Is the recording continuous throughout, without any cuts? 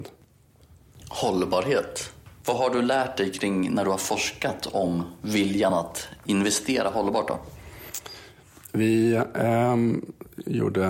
yes; 0 cuts

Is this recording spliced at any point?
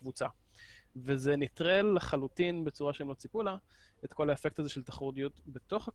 no; 0 cuts

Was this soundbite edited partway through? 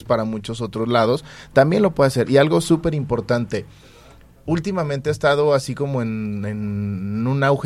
no; 0 cuts

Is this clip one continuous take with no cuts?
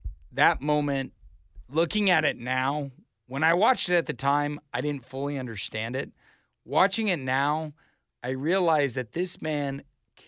yes; 0 cuts

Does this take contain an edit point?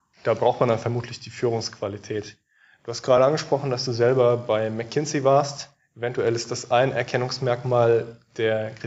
no; 0 cuts

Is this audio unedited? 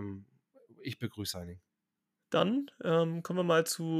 no; 1 cut; at 1.3 s

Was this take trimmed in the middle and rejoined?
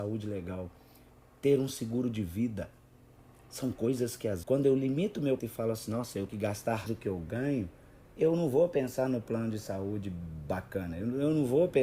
yes; 4 cuts; at 4.4 s, 5.4 s, 6.3 s, 6.9 s

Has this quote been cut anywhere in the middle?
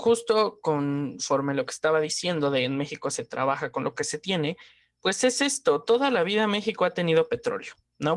no; 0 cuts

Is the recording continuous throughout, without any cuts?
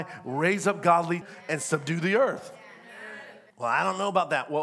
no; 2 cuts; at 1.2 s, 3.5 s

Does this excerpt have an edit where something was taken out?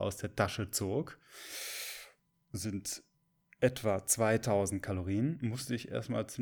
no; 0 cuts

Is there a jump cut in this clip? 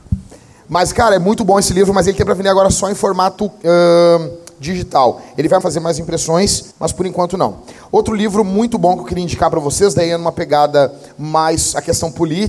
yes; 2 cuts; at 5.6 s, 6.7 s

